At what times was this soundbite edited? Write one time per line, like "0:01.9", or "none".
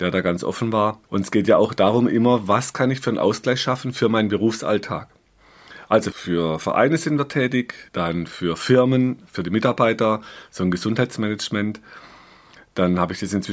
0:01.0
0:07.9